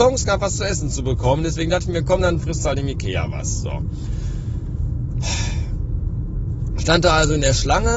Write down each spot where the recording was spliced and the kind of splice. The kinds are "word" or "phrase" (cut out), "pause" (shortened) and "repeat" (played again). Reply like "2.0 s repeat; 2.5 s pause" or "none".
none